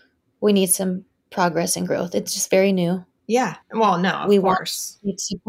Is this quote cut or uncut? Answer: cut